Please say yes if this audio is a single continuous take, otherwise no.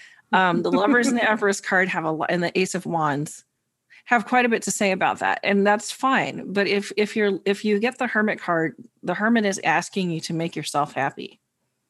yes